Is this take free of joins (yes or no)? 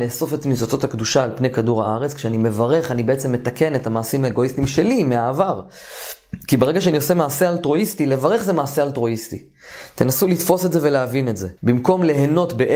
no